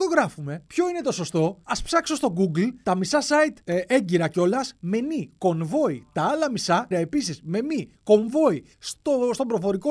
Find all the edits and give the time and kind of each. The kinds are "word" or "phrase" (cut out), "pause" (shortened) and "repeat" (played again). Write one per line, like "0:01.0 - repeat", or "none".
0:06.9 - word
0:08.7 - pause